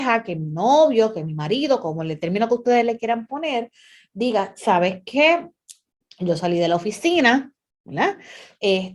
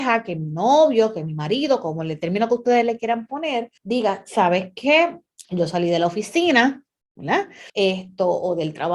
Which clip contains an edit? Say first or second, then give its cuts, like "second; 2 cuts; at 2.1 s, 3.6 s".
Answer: second; 3 cuts; at 3.8 s, 5.4 s, 7.7 s